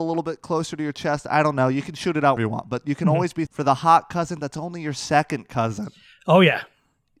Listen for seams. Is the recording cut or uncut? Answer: cut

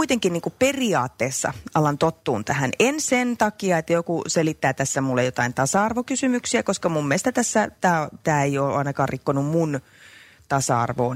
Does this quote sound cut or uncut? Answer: uncut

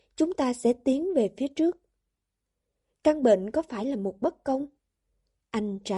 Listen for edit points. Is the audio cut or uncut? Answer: uncut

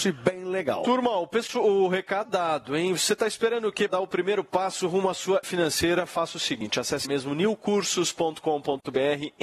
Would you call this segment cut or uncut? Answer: cut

